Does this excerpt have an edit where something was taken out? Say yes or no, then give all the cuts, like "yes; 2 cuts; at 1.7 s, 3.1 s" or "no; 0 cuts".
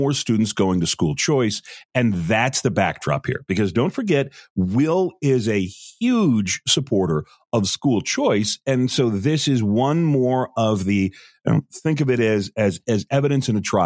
no; 0 cuts